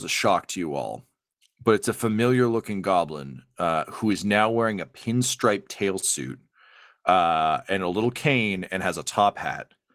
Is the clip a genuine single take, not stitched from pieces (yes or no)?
yes